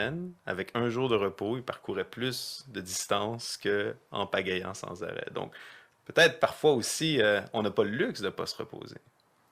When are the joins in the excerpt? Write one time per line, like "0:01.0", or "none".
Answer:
none